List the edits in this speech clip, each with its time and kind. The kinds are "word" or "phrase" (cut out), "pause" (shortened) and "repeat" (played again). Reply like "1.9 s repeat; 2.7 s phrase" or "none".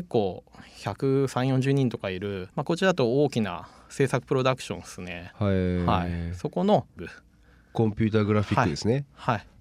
2.5 s pause; 7.0 s word